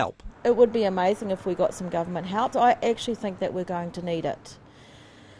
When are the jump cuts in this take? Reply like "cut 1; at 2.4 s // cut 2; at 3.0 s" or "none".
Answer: cut 1; at 2.5 s